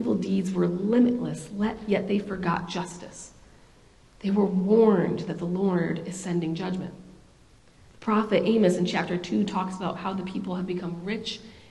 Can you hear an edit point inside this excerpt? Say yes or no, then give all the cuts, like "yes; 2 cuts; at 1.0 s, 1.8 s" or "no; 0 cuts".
no; 0 cuts